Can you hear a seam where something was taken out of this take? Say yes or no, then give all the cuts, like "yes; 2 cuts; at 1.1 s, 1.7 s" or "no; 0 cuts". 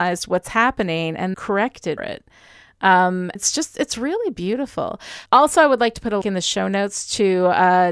yes; 4 cuts; at 1.3 s, 2.0 s, 3.3 s, 6.2 s